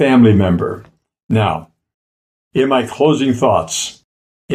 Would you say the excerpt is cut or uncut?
uncut